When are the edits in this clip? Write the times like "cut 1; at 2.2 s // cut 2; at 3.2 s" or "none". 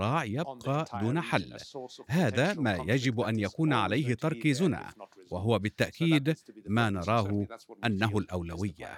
none